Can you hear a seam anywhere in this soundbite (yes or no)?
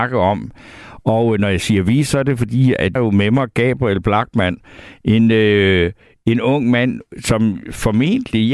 yes